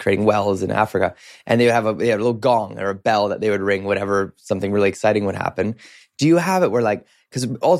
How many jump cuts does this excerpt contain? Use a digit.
0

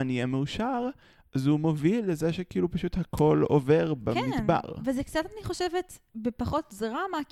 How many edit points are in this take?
0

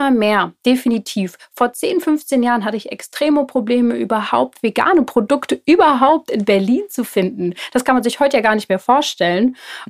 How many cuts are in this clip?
0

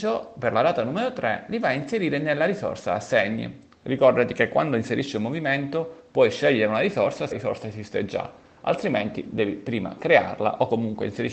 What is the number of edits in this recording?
1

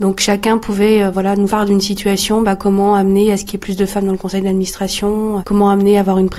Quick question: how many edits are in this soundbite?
2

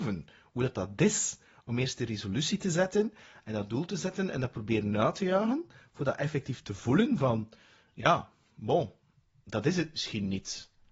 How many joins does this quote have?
0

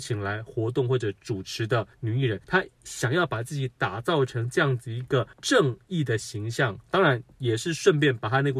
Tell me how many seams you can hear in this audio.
3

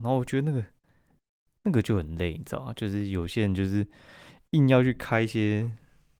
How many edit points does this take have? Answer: 0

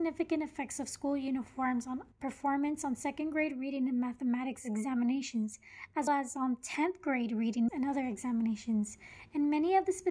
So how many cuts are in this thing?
3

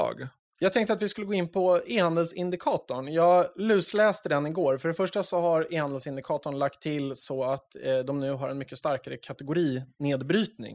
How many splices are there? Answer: 0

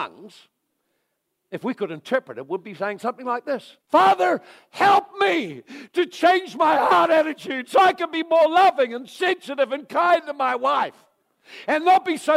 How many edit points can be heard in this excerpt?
1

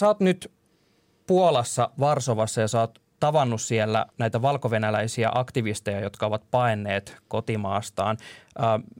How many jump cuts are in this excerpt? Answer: 2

